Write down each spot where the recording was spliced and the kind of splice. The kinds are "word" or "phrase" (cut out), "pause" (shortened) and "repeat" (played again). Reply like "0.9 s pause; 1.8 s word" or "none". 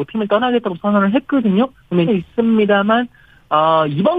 2.1 s phrase